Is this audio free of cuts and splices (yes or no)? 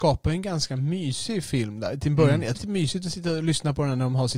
no